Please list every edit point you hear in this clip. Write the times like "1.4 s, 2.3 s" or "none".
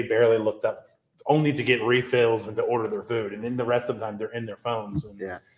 none